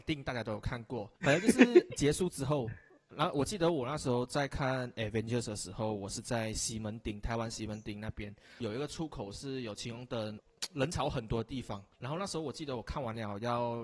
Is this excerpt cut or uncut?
cut